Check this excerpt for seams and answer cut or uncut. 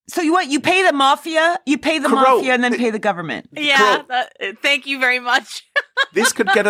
uncut